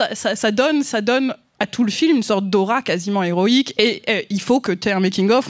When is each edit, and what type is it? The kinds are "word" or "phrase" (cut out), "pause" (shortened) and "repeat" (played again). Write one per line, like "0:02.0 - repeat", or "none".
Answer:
none